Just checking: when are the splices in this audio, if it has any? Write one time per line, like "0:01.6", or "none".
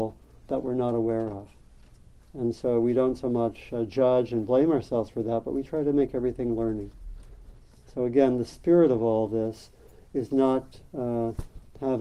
none